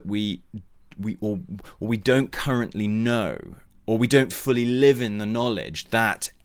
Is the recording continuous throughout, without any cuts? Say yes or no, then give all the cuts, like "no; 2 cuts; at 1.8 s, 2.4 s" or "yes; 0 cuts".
yes; 0 cuts